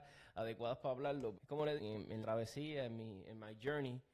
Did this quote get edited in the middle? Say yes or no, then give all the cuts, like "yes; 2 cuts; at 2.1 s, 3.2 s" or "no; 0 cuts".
yes; 3 cuts; at 1.3 s, 1.8 s, 2.2 s